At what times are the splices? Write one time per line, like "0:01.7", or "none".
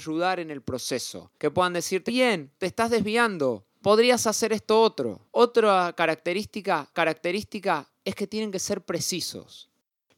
0:01.4
0:02.1
0:02.6
0:03.7
0:05.3
0:06.9